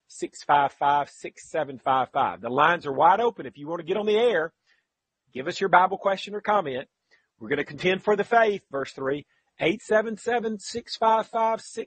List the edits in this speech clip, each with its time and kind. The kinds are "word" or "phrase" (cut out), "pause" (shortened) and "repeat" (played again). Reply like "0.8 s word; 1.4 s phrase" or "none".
8.7 s word